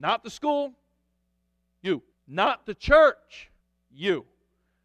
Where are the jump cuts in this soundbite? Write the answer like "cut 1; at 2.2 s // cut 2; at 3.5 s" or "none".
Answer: cut 1; at 2.1 s // cut 2; at 3.6 s